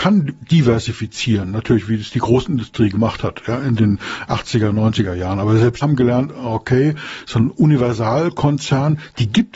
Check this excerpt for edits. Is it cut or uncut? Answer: cut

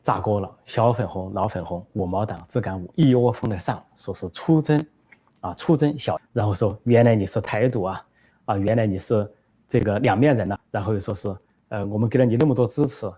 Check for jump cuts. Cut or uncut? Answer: cut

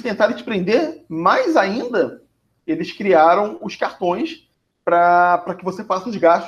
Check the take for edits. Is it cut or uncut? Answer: uncut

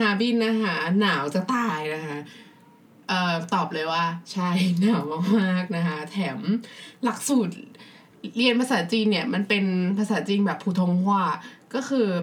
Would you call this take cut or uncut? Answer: uncut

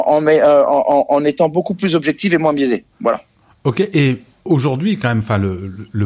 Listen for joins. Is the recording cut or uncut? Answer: cut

